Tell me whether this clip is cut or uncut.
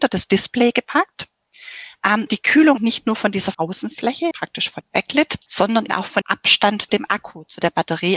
cut